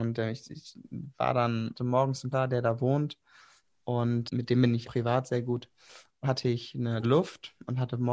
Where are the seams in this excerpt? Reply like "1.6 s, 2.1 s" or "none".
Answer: 1.8 s, 2.3 s, 4.3 s, 4.8 s, 6.2 s, 7.0 s